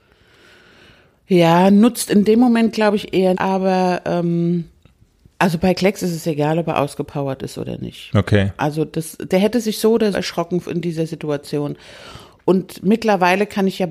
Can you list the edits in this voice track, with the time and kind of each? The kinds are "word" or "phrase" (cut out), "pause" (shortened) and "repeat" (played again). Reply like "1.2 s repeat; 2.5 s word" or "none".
3.3 s word; 10.1 s word